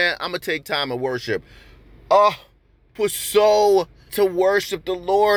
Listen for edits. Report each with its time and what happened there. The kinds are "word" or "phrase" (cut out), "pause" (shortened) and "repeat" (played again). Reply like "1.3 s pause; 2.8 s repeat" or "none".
3.0 s word; 4.1 s word